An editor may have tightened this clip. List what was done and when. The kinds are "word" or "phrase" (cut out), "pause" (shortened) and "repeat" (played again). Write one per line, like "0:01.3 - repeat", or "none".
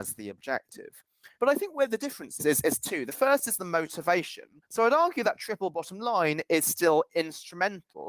0:01.3 - pause
0:02.4 - word
0:04.6 - pause